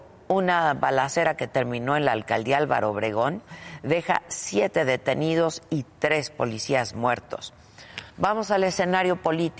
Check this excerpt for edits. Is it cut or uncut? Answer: cut